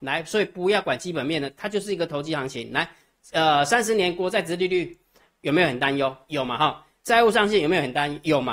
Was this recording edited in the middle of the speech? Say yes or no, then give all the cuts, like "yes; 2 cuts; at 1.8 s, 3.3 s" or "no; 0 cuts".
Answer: no; 0 cuts